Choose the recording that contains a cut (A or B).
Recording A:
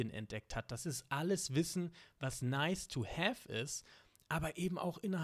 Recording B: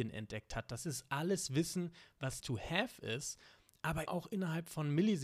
B